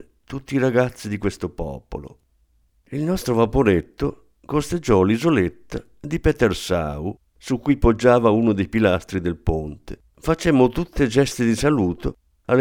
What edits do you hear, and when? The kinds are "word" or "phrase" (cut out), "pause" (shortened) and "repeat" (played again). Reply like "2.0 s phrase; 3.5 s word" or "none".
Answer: 2.7 s pause; 10.1 s pause